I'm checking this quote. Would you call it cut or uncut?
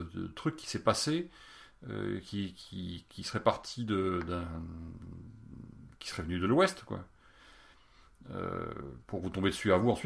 uncut